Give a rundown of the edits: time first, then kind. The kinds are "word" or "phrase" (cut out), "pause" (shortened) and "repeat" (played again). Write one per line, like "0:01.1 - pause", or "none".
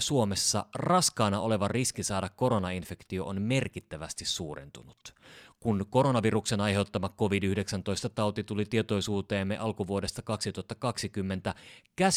none